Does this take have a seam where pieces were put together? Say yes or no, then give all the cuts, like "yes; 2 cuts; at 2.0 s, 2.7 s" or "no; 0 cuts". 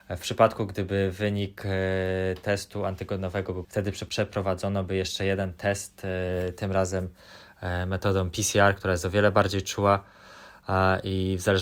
yes; 1 cut; at 3.6 s